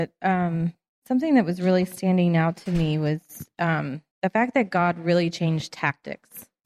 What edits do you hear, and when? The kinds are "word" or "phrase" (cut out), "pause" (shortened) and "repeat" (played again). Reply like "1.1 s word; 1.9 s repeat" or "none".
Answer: 4.1 s pause